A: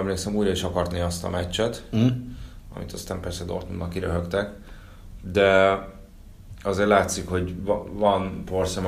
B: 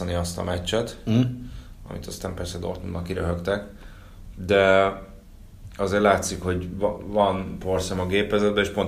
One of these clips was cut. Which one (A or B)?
A